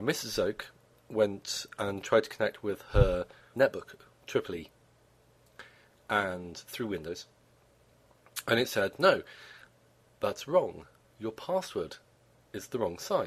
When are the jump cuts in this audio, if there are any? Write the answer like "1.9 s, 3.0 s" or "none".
3.5 s